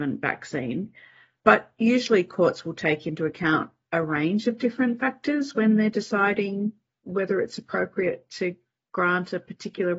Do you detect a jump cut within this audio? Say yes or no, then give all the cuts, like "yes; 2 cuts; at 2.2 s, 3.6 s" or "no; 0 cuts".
no; 0 cuts